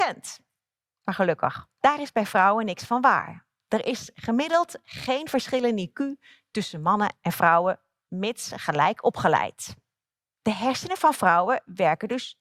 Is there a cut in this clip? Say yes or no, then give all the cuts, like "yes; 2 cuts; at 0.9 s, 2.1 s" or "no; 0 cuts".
no; 0 cuts